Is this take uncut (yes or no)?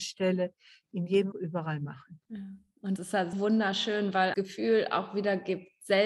no